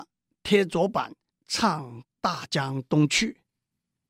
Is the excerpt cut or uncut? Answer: cut